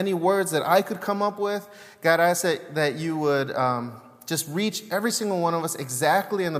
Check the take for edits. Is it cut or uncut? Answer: uncut